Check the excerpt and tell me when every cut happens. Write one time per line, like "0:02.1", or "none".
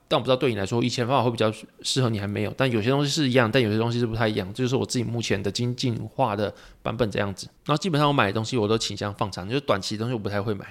0:07.6